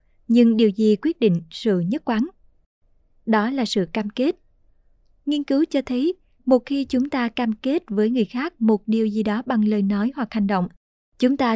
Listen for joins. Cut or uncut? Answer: uncut